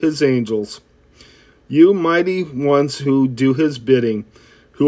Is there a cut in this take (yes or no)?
no